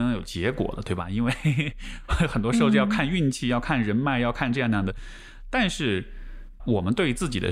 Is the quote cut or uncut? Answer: cut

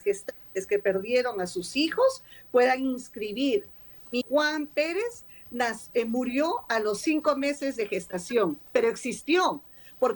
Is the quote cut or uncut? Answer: cut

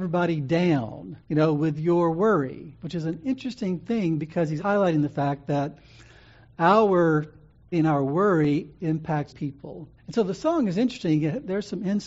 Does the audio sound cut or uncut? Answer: cut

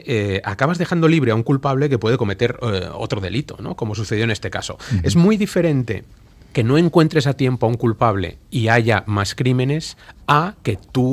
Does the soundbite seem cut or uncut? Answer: uncut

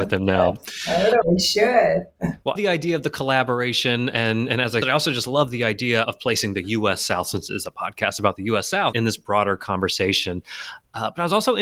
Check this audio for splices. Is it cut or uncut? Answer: cut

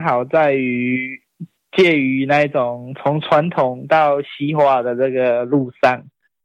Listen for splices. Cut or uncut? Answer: uncut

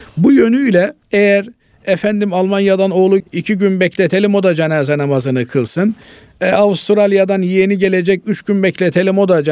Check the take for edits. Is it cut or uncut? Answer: cut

